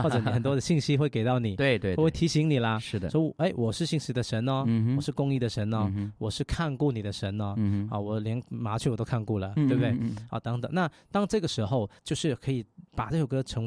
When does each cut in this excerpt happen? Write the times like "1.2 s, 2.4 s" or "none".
12.0 s